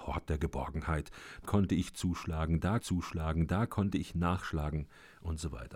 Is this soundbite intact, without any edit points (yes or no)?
no